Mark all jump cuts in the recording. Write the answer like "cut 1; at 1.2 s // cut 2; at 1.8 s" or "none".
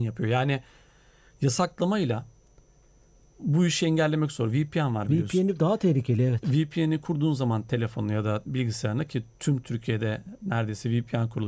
none